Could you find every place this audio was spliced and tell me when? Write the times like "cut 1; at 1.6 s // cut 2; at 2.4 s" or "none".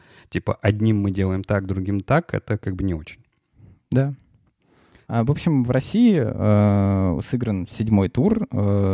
none